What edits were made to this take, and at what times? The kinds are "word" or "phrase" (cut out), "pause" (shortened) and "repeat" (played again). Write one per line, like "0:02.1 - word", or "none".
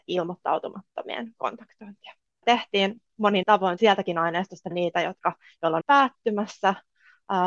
0:02.4 - word
0:03.4 - word
0:03.8 - word
0:04.7 - word
0:05.8 - word